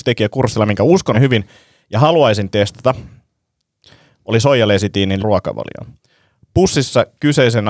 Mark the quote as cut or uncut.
cut